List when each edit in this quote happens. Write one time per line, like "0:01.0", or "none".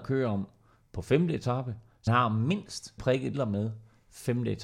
0:02.1
0:03.0
0:03.3